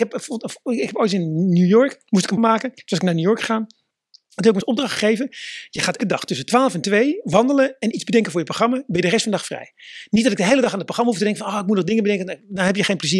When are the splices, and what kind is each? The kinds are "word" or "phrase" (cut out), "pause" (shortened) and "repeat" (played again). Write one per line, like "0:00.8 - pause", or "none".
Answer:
0:02.4 - word
0:04.6 - word
0:06.0 - word